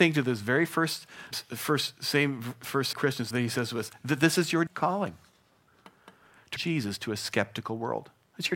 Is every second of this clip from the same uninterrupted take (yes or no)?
no